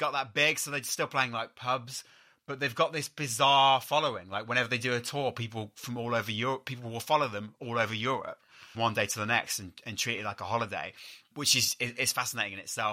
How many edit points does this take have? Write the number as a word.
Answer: one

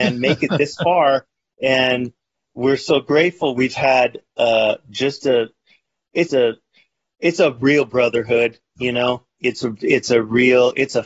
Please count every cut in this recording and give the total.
one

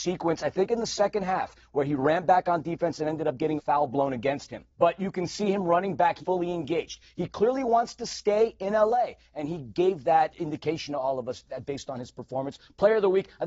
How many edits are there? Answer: four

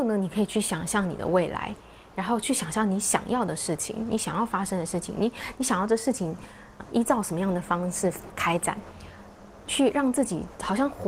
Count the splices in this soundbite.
one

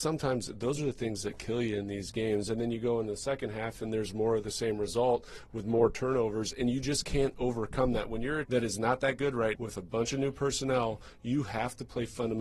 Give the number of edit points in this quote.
two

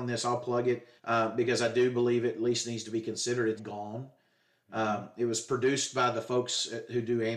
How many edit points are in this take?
two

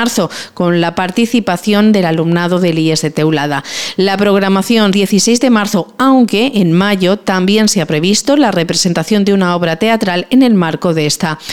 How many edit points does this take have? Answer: one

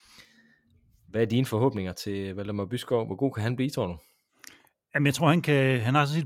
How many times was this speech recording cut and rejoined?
zero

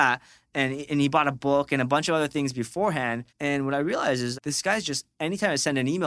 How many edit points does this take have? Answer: two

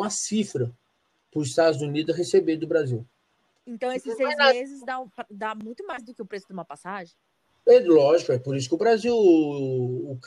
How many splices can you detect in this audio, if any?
zero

